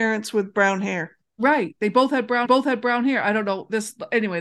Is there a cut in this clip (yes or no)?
yes